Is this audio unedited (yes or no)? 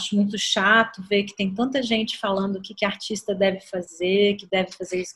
yes